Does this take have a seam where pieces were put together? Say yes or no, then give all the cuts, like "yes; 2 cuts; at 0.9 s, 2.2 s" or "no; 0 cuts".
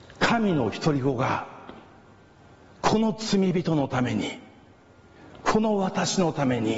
no; 0 cuts